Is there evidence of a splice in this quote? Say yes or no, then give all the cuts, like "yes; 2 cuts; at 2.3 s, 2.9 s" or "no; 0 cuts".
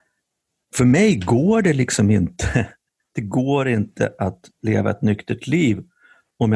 no; 0 cuts